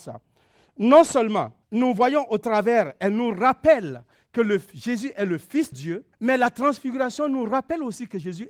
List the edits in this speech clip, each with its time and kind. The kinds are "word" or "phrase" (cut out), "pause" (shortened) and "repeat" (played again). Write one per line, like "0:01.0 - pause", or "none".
0:01.6 - pause
0:05.7 - word
0:06.1 - pause